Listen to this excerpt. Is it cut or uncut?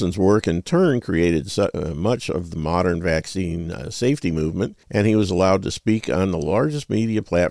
cut